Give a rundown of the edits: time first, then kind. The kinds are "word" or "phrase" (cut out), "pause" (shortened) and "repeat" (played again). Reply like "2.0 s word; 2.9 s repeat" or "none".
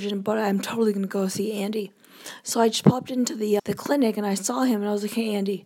3.6 s word